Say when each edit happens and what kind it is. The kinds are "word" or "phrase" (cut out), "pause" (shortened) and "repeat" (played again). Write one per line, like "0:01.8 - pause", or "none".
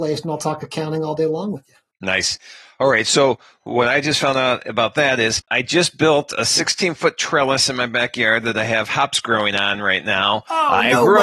0:05.4 - pause